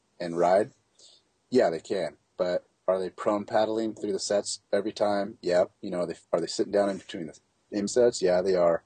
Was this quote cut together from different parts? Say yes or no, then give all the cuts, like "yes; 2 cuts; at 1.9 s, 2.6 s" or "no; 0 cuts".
yes; 4 cuts; at 4.7 s, 5.8 s, 6.2 s, 7.9 s